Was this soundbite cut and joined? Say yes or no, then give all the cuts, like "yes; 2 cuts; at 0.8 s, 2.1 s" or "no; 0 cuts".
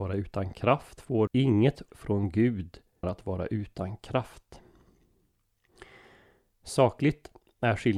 yes; 3 cuts; at 1.3 s, 1.9 s, 3.0 s